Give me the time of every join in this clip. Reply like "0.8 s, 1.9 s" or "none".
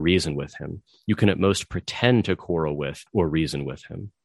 3.1 s